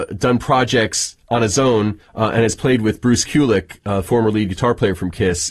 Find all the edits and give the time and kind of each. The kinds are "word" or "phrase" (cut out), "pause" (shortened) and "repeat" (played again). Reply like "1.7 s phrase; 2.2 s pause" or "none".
2.0 s pause